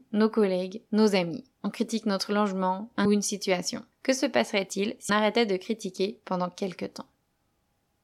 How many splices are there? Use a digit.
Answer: 4